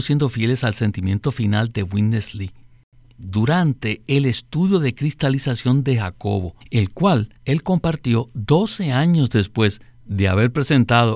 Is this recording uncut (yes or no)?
no